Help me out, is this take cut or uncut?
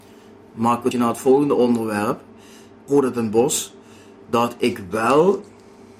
cut